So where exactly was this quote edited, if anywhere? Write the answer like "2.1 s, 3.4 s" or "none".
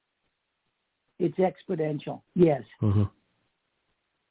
2.3 s